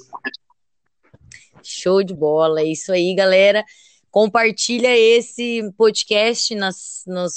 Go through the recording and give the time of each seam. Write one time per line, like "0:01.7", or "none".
none